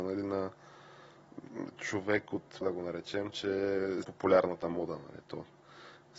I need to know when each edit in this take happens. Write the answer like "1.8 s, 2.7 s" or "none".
2.6 s, 4.0 s